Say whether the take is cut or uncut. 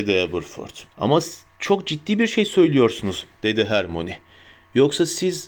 cut